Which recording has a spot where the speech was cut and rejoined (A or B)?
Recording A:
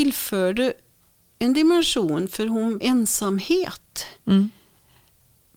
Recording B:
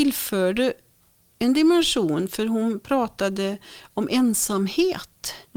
A